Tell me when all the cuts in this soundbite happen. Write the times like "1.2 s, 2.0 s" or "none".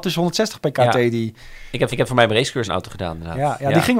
1.9 s, 2.7 s